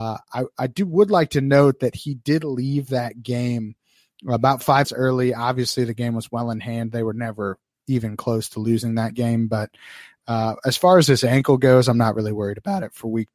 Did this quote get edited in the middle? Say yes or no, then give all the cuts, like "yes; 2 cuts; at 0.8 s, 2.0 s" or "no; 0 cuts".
yes; 1 cut; at 4.8 s